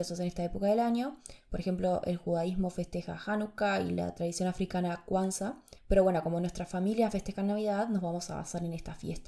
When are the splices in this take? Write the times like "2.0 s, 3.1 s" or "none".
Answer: 5.8 s